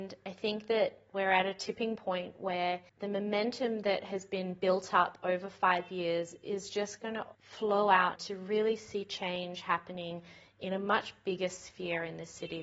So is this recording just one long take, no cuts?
no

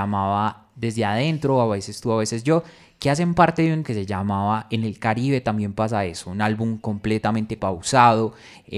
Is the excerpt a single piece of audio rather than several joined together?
no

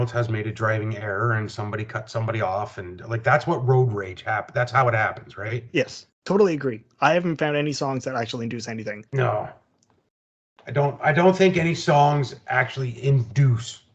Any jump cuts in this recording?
yes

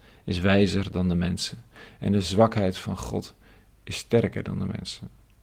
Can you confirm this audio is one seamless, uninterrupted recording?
yes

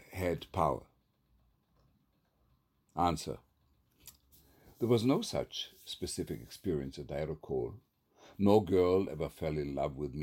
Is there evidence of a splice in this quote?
no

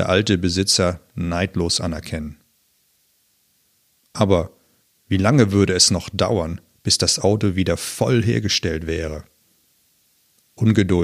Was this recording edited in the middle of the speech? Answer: no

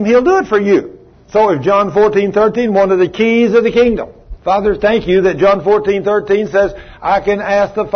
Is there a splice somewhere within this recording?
yes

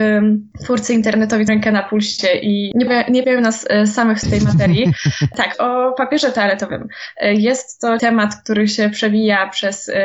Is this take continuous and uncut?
no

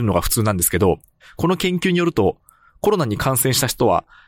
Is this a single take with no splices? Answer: yes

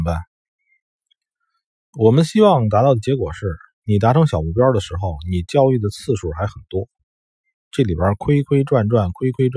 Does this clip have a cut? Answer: no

